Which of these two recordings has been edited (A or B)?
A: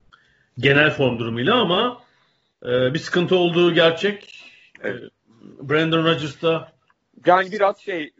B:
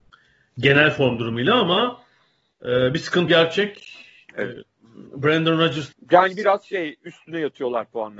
B